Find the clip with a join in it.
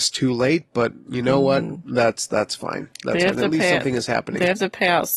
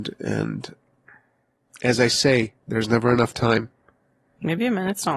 second; 1 cut; at 2.6 s

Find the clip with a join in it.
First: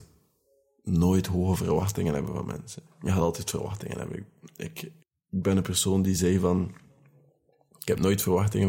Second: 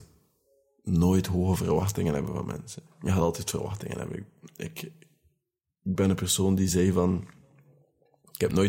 first; 1 cut; at 5.0 s

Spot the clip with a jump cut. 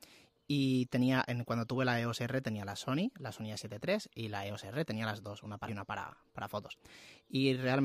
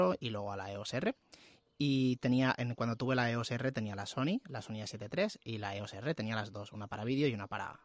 first; 1 cut; at 5.7 s

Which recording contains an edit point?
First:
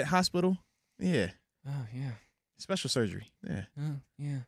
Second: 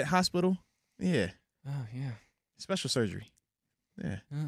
first; 1 cut; at 3.4 s

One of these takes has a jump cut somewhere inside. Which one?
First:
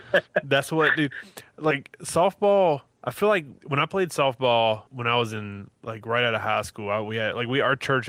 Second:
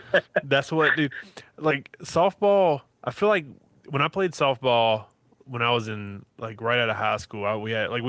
first; 2 cuts; at 3.6 s, 4.9 s

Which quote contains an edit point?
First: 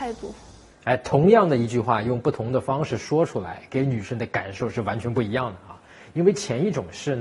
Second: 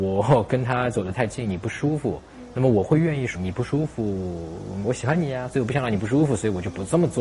second; 2 cuts; at 3.4 s, 4.8 s

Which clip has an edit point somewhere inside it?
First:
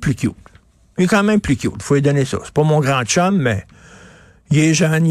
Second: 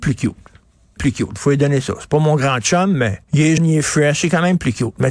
second; 3 cuts; at 1.0 s, 3.2 s, 3.6 s

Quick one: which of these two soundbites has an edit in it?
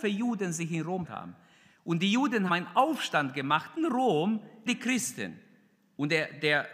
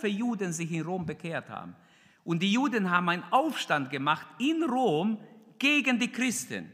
first; 4 cuts; at 1.0 s, 2.5 s, 3.8 s, 4.7 s

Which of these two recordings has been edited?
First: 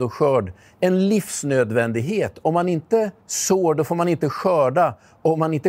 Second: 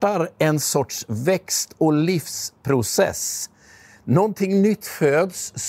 first; 1 cut; at 3.2 s

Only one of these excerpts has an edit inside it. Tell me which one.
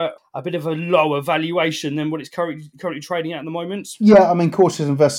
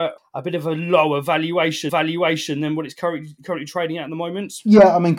second; 1 cut; at 1.9 s

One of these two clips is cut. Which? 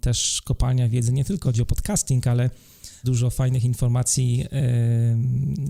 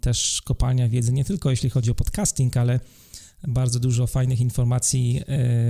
first; 2 cuts; at 1.4 s, 3.0 s

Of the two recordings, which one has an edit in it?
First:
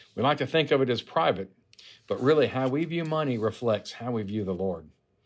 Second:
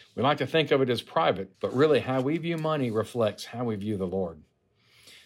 second; 1 cut; at 1.5 s

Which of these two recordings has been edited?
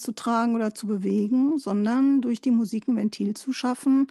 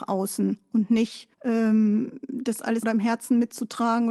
second; 2 cuts; at 1.3 s, 2.8 s

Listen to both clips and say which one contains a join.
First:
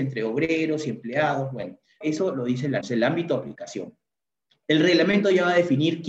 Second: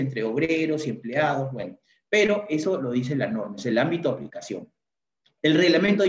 first; 2 cuts; at 2.0 s, 2.8 s

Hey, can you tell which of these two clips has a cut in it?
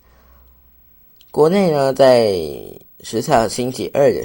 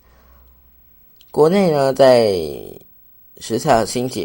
first; 1 cut; at 2.9 s

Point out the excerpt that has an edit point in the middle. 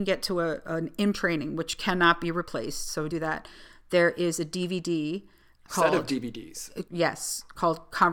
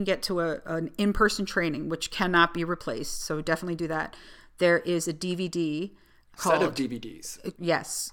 first; 2 cuts; at 1.1 s, 3.1 s

